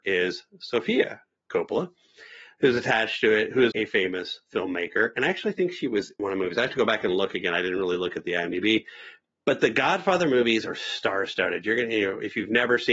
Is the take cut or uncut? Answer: cut